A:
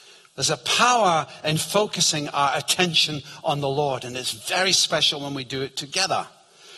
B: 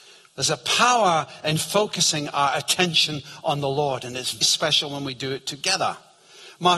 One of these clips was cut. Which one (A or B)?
B